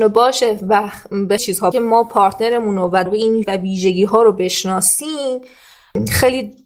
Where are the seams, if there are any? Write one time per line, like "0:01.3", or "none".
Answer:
0:01.4
0:01.7
0:03.1
0:03.4